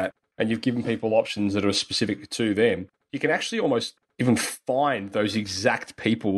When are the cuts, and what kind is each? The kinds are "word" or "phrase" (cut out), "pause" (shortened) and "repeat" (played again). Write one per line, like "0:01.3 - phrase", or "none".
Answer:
none